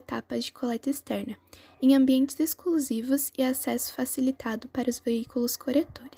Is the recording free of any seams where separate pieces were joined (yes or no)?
yes